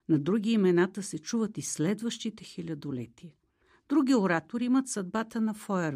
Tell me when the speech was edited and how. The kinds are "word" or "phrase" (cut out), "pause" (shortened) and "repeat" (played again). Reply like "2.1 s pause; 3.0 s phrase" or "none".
none